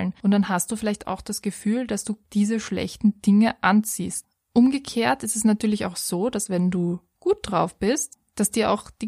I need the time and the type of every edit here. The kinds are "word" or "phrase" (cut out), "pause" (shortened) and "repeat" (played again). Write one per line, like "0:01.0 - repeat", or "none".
0:02.2 - pause